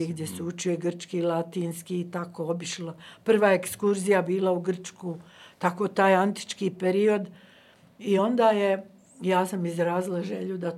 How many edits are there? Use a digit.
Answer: 0